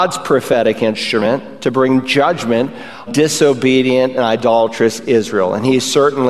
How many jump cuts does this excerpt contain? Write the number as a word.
one